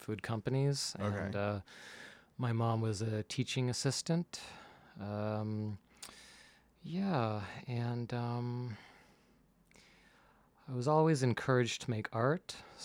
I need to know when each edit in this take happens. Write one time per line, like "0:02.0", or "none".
none